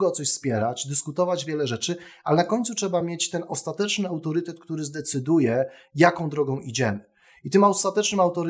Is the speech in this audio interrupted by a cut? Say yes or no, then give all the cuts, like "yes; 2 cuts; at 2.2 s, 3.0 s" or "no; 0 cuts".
no; 0 cuts